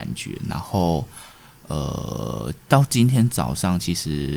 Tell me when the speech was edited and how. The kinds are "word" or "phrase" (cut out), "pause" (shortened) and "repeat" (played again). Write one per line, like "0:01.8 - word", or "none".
none